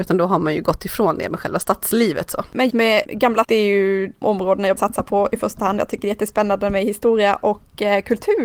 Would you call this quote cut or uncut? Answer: cut